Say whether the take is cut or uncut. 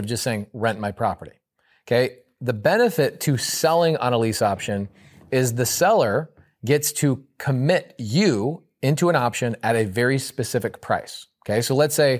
uncut